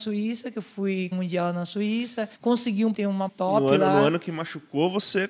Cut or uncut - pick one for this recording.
cut